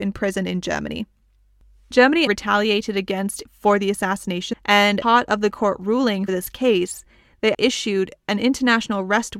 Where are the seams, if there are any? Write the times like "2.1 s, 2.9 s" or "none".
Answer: 2.3 s, 3.4 s, 4.5 s, 5.0 s, 6.3 s, 7.5 s